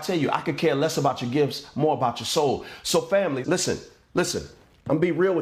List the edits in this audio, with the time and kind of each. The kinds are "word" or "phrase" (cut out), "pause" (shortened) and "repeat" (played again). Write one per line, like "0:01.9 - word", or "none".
0:03.4 - word